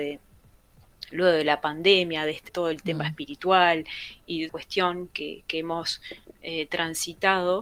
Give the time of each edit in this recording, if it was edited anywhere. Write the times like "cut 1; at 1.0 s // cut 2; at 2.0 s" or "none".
cut 1; at 2.5 s // cut 2; at 4.5 s